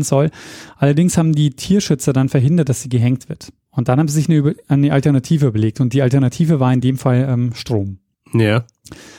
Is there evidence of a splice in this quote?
no; 0 cuts

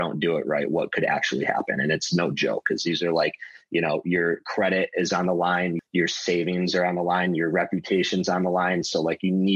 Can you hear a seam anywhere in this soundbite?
no; 0 cuts

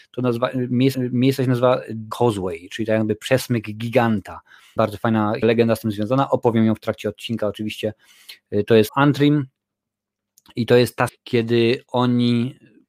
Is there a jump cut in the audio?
yes; 6 cuts; at 0.9 s, 2.1 s, 4.8 s, 5.4 s, 8.9 s, 11.1 s

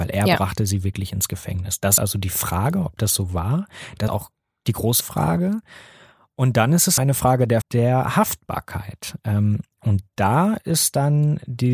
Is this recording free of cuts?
no; 5 cuts; at 2.0 s, 4.1 s, 5.0 s, 7.0 s, 7.6 s

